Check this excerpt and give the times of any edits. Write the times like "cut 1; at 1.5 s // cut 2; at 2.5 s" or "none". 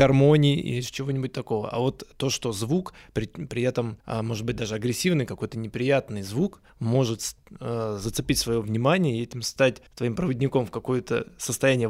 cut 1; at 4.0 s // cut 2; at 6.7 s // cut 3; at 9.9 s